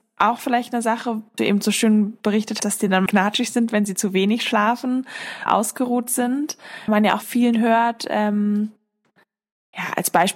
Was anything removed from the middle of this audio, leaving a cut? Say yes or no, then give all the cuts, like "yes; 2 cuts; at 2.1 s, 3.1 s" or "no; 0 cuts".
yes; 6 cuts; at 1.4 s, 2.6 s, 3.1 s, 5.5 s, 6.9 s, 7.2 s